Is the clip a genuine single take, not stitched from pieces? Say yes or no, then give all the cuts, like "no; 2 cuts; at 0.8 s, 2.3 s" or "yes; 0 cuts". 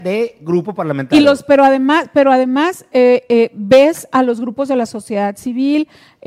yes; 0 cuts